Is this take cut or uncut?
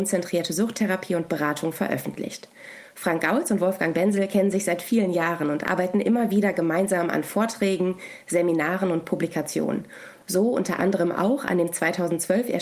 uncut